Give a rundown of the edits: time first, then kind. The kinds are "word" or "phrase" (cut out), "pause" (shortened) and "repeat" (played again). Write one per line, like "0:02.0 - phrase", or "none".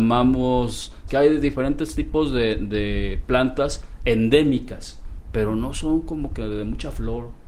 0:01.1 - word